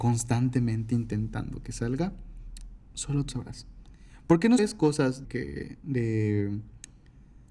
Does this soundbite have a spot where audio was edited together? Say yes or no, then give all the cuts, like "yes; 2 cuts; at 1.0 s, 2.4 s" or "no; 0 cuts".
yes; 3 cuts; at 3.3 s, 4.6 s, 5.2 s